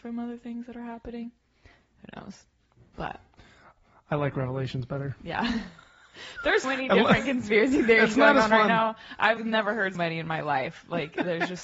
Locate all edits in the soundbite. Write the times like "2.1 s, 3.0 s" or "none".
2.9 s, 6.6 s, 9.4 s, 9.9 s